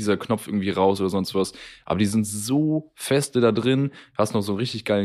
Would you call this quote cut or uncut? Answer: uncut